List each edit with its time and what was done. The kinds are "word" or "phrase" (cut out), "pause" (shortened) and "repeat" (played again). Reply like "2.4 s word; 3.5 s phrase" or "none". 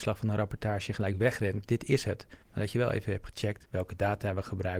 2.4 s pause